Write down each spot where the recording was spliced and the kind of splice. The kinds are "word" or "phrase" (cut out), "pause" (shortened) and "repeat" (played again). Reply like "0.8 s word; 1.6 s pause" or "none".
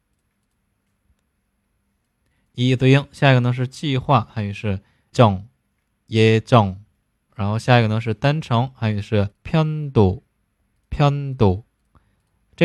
5.1 s word; 7.3 s word; 9.3 s pause